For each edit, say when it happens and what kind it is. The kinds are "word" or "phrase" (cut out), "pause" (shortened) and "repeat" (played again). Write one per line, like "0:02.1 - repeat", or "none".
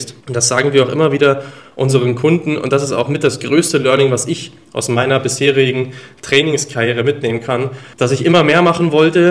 0:07.9 - pause